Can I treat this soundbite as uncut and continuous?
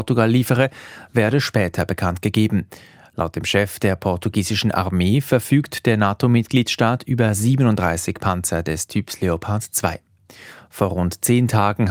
yes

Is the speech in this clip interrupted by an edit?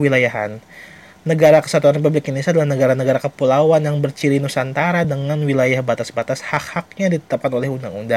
no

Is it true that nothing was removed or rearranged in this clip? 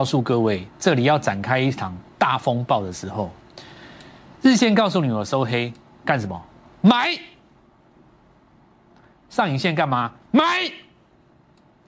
yes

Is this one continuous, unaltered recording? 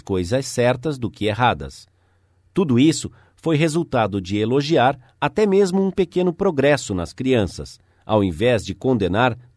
yes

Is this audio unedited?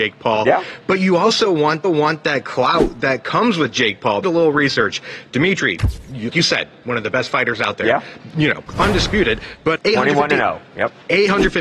no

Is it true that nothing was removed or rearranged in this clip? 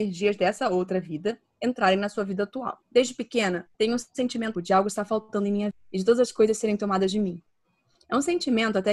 no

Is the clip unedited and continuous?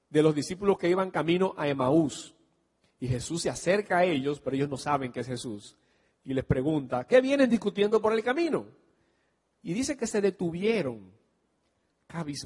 yes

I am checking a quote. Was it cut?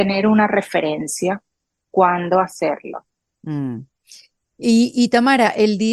yes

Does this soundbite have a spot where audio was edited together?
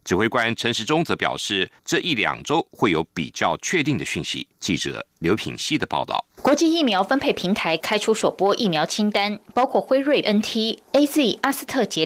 yes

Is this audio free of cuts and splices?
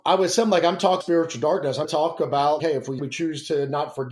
no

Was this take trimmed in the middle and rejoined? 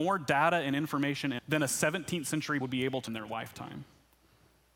yes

